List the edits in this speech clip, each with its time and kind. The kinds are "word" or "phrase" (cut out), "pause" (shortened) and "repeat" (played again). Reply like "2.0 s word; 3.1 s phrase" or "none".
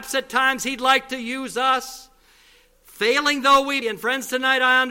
3.8 s word